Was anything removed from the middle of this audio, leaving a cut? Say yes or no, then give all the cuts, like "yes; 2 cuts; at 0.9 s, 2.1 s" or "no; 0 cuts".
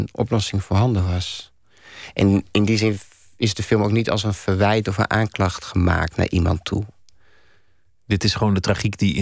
no; 0 cuts